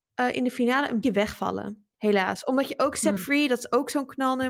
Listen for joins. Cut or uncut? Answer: cut